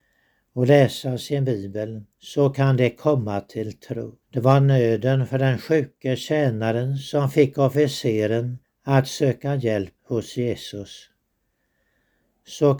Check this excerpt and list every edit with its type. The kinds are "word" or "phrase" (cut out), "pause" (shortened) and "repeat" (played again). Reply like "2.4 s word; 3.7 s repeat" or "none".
2.1 s pause; 4.2 s pause; 8.6 s pause; 10.0 s pause